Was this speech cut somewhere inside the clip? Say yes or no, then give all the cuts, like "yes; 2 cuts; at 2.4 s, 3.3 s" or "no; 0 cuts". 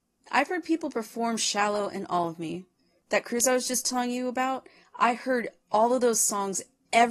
no; 0 cuts